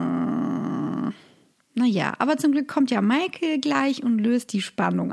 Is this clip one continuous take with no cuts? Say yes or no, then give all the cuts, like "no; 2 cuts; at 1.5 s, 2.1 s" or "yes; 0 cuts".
yes; 0 cuts